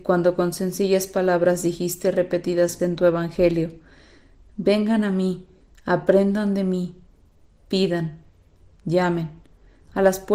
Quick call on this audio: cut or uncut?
cut